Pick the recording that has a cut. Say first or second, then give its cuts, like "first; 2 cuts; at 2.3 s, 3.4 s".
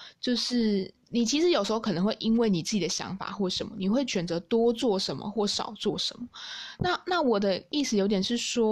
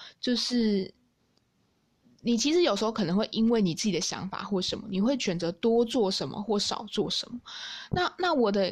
first; 1 cut; at 1.0 s